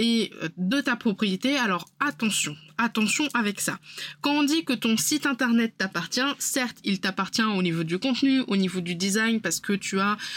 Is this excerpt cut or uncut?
uncut